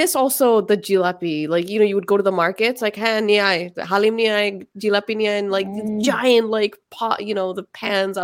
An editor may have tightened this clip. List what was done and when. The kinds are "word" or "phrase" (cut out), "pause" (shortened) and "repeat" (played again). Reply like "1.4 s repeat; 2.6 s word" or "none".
none